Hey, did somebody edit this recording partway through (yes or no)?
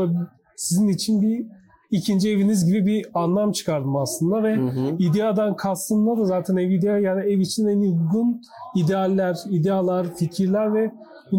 no